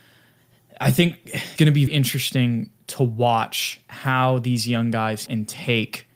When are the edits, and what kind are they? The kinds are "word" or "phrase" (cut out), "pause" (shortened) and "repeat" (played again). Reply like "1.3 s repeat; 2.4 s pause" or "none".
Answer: 1.6 s word; 1.9 s word; 5.3 s word